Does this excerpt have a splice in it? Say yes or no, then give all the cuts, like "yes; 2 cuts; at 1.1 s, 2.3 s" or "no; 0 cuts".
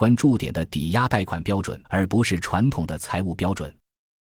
yes; 1 cut; at 1.8 s